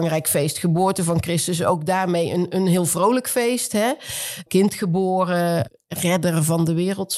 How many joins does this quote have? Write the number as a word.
zero